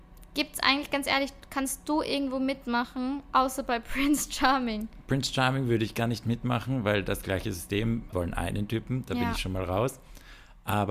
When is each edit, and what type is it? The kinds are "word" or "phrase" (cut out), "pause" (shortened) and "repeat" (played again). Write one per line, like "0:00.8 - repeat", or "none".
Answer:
0:08.1 - word